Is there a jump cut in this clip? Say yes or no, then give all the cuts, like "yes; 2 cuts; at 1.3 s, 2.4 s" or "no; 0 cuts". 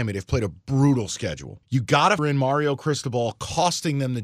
yes; 2 cuts; at 1.6 s, 2.2 s